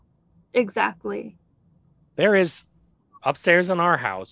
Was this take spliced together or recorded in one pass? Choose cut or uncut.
uncut